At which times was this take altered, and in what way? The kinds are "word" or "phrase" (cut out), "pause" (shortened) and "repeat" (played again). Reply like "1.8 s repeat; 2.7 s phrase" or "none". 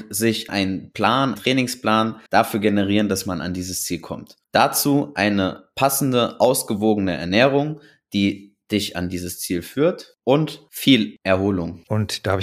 1.3 s word; 2.3 s pause; 4.4 s pause